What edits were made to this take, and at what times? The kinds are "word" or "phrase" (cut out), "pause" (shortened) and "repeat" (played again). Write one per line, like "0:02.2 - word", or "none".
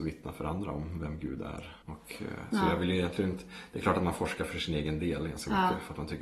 0:01.8 - pause